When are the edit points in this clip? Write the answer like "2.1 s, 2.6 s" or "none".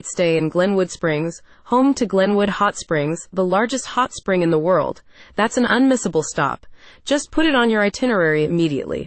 none